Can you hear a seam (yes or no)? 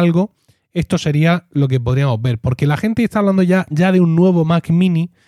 no